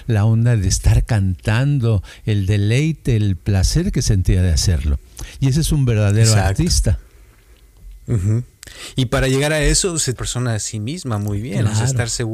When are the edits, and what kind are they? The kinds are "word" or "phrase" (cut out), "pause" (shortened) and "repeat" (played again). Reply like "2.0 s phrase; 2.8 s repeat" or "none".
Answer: 10.2 s phrase